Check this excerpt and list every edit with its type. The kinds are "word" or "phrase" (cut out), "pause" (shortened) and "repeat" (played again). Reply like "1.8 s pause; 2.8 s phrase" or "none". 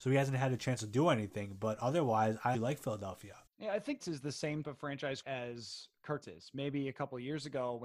2.5 s word; 3.5 s pause; 4.0 s phrase; 4.6 s word; 5.2 s word; 6.2 s word